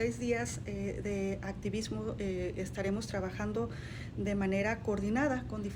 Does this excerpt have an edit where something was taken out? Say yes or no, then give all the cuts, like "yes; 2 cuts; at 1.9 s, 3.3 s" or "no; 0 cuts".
no; 0 cuts